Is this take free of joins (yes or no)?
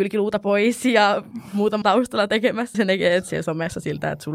no